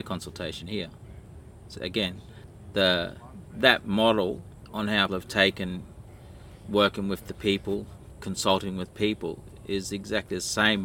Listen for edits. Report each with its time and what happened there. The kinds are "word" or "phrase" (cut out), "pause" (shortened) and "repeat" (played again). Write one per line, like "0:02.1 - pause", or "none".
0:01.7 - word
0:05.1 - word